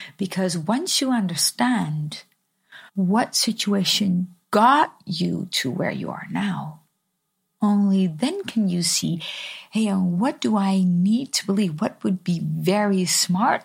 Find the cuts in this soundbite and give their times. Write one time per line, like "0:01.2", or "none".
0:02.9
0:04.4